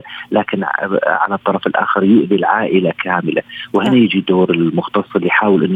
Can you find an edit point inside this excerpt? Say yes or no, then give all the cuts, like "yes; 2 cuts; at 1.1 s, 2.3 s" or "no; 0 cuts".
no; 0 cuts